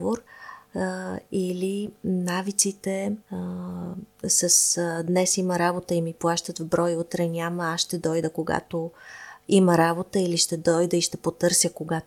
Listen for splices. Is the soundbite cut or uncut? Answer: cut